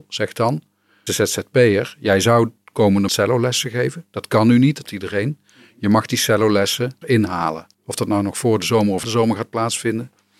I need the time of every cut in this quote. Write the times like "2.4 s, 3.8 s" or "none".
1.1 s, 3.1 s, 4.8 s, 7.0 s, 7.7 s, 9.0 s